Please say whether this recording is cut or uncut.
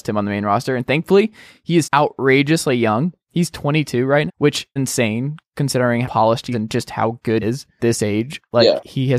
cut